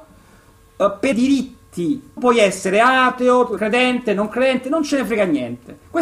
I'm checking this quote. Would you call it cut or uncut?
cut